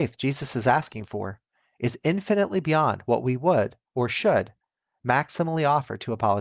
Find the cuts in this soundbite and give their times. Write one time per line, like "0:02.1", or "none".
none

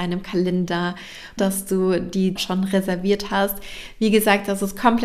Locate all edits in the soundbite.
0:01.4
0:02.4

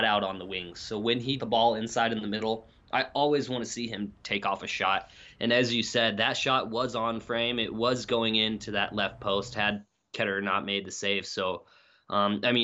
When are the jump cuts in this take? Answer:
0:01.4

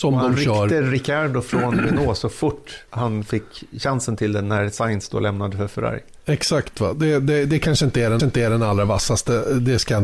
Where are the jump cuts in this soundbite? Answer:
0:02.9
0:06.2
0:08.2

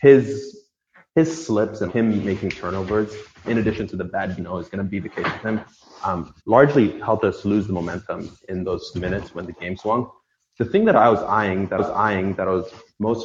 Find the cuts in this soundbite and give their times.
0:01.9
0:03.4
0:04.4
0:06.4
0:08.9
0:11.8

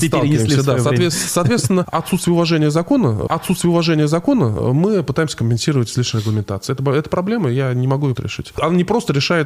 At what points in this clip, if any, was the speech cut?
0:03.3
0:08.2

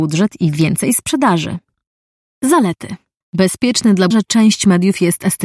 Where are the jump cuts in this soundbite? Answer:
0:04.1

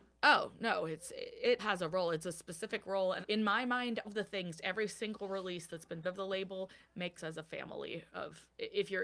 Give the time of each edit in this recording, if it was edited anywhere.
0:01.6
0:03.2
0:04.0
0:06.0
0:07.2

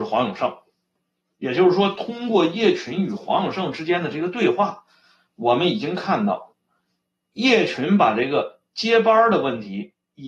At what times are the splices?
none

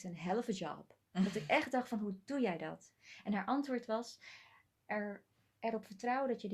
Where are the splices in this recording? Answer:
none

